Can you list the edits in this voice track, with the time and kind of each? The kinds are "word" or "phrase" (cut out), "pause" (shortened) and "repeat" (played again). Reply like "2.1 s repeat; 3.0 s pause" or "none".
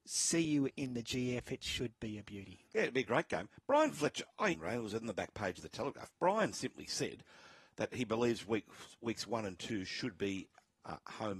4.5 s word